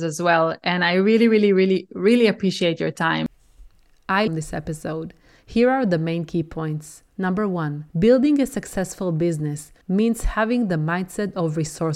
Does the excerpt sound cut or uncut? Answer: cut